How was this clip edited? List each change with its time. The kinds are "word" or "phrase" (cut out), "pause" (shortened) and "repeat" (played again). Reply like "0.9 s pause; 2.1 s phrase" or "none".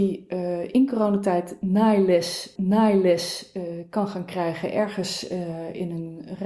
2.6 s repeat

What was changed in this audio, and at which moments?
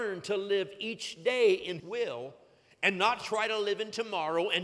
1.8 s word

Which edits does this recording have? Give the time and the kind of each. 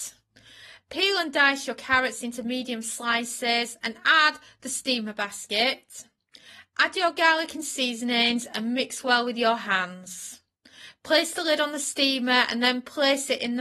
none

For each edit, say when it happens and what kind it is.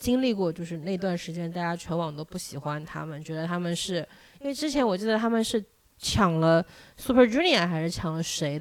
none

